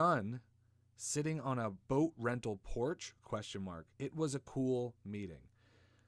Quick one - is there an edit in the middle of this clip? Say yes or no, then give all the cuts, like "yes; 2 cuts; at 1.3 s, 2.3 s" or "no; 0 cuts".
yes; 2 cuts; at 1.8 s, 3.9 s